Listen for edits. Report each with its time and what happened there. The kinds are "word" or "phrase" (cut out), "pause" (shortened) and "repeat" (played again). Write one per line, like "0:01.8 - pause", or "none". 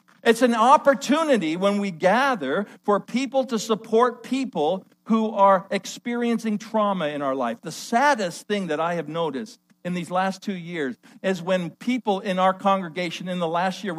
none